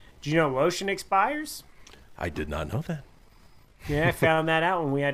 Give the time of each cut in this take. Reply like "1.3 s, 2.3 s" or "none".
none

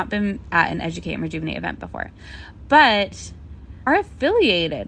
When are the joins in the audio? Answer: 3.9 s

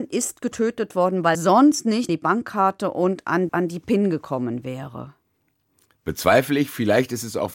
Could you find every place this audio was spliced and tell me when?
1.3 s, 2.1 s, 3.5 s

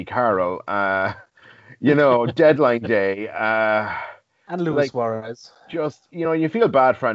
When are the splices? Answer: none

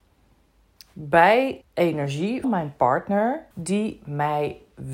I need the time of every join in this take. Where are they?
1.6 s, 2.4 s, 3.5 s

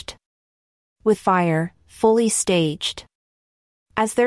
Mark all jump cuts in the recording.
1.2 s

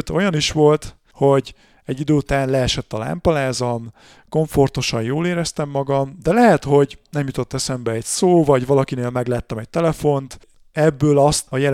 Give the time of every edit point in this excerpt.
none

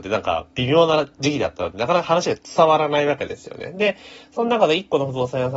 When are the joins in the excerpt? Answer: none

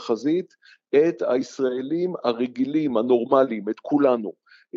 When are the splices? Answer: none

